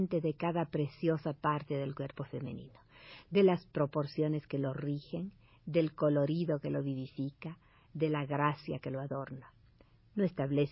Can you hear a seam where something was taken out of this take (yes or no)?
no